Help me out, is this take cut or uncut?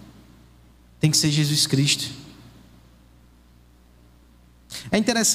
uncut